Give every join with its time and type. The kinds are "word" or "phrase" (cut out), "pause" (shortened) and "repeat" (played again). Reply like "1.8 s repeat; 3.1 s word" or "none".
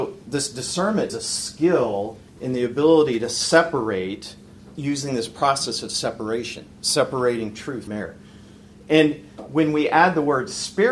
1.1 s word; 4.7 s word; 7.9 s word

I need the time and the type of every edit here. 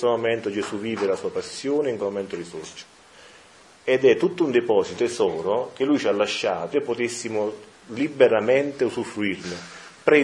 2.0 s word; 5.0 s word; 6.7 s word

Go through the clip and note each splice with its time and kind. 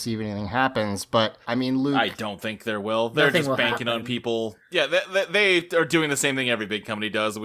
1.4 s pause

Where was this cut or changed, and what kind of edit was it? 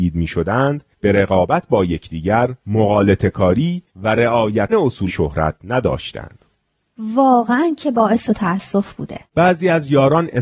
0.9 s pause; 2.6 s pause; 3.9 s pause; 4.7 s word; 5.1 s word; 8.3 s word; 9.3 s pause

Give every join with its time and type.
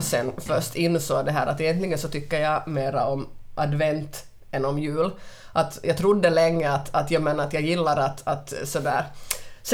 none

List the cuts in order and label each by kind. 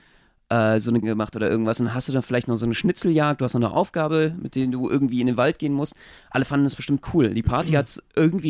1.0 s word

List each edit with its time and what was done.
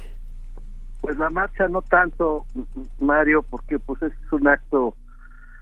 none

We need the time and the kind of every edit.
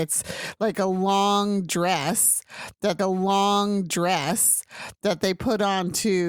3.0 s repeat

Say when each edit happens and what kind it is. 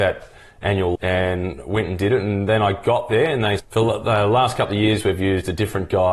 1.0 s word; 3.6 s word

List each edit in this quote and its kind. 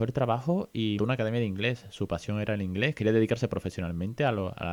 1.0 s word

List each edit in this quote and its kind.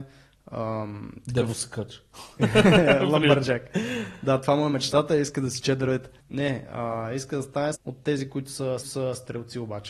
6.2 s pause; 7.7 s word; 8.8 s repeat

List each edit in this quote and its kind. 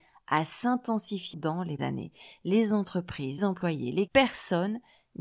1.3 s word; 1.8 s word; 3.4 s word; 4.1 s word

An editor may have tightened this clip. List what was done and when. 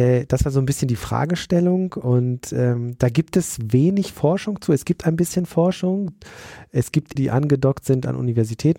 7.2 s phrase

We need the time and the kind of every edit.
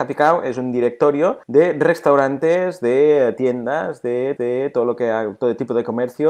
1.4 s pause; 4.4 s repeat

